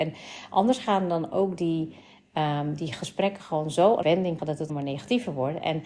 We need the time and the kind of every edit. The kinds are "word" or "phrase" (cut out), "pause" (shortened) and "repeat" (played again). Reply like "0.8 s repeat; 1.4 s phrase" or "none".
4.0 s word; 4.4 s word; 4.7 s word